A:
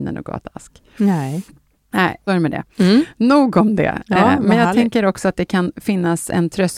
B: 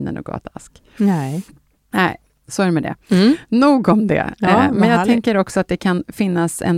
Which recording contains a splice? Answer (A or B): A